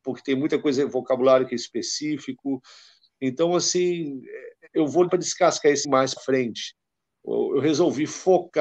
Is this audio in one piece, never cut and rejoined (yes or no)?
no